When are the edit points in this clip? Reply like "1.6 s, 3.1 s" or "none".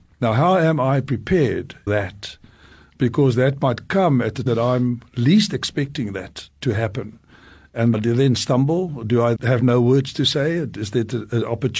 1.9 s, 4.5 s, 7.9 s, 9.4 s